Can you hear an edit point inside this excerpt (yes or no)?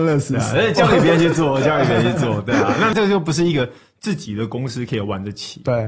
no